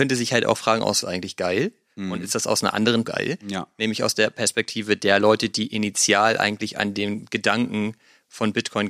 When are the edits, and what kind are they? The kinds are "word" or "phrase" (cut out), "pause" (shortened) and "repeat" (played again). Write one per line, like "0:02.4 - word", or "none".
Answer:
0:01.0 - phrase
0:03.0 - phrase